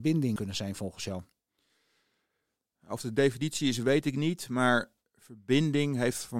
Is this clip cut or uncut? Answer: uncut